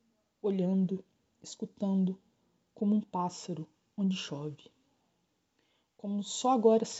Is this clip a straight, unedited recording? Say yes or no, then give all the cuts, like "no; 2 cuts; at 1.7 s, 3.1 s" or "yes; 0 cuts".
yes; 0 cuts